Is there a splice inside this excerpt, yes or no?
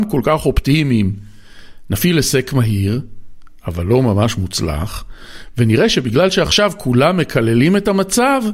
no